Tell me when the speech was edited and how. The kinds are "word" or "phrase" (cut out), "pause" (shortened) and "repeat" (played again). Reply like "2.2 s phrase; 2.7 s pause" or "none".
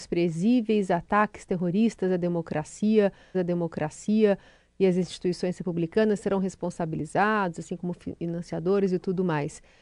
3.3 s repeat